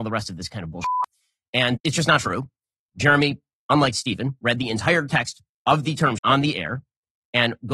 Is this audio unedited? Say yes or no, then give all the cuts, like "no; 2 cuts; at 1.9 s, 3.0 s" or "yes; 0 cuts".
no; 2 cuts; at 1.8 s, 6.2 s